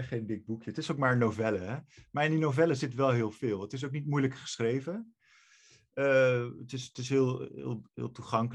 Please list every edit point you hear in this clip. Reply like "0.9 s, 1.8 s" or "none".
none